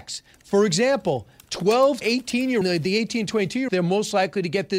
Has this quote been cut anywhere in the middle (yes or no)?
yes